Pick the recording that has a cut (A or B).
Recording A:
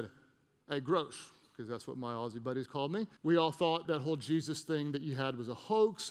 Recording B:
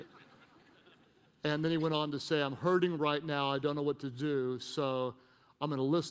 A